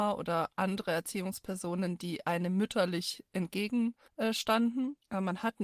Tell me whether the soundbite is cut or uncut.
uncut